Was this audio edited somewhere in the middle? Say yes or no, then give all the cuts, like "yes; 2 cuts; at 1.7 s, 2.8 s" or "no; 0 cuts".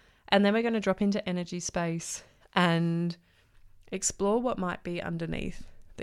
no; 0 cuts